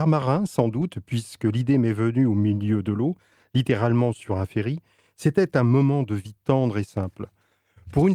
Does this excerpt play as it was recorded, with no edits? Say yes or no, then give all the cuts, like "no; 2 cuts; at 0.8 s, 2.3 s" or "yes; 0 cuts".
yes; 0 cuts